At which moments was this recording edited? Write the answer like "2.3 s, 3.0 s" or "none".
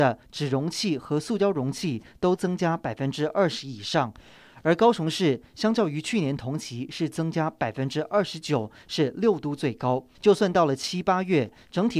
10.1 s